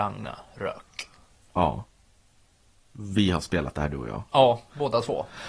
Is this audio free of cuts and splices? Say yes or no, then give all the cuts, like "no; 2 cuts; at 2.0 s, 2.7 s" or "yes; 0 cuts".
yes; 0 cuts